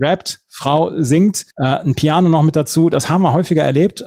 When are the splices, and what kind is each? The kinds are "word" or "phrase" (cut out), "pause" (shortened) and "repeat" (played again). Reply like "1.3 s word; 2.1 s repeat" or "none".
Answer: 1.5 s pause